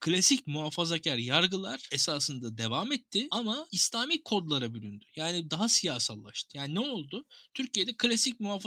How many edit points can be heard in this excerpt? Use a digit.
0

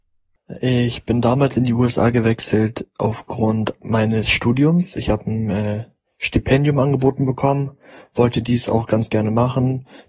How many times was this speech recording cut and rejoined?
0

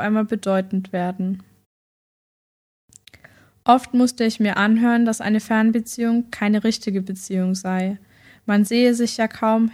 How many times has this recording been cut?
0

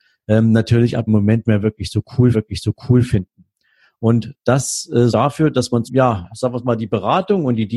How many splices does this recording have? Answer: 5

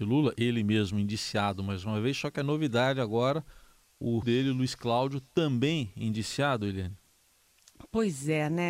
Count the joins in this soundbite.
1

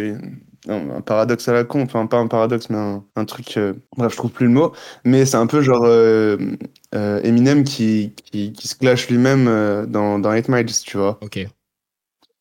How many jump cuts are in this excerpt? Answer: 2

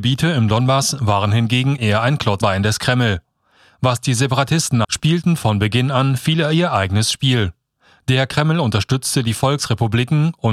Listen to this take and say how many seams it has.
3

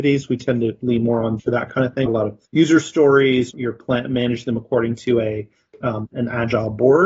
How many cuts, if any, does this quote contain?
5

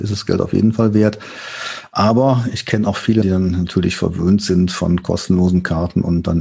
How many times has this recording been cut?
1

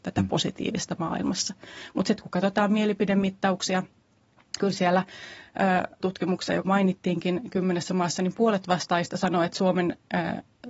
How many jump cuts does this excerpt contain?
3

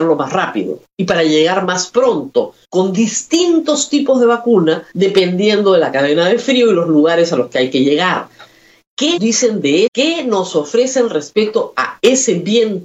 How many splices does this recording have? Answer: 4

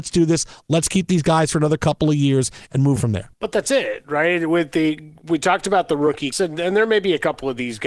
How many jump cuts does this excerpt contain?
3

